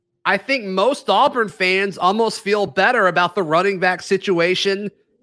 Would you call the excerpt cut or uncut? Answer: uncut